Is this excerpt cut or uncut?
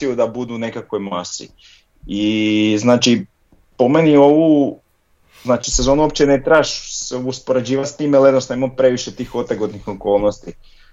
uncut